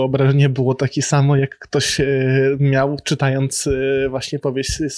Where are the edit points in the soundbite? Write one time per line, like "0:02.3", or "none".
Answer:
none